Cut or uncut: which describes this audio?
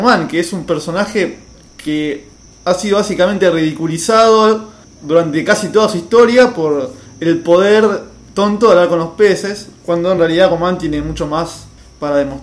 uncut